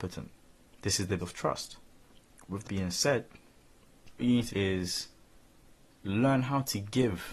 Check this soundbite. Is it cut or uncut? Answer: cut